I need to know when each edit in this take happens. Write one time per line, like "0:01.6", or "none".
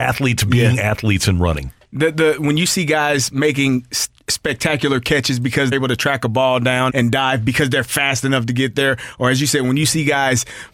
0:05.7
0:06.9